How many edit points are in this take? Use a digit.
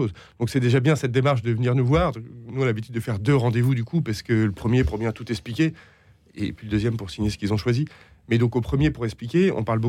0